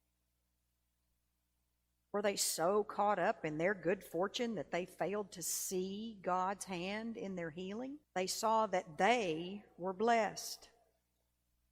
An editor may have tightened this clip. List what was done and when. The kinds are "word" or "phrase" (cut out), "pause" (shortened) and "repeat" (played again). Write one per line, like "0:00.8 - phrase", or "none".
0:08.0 - pause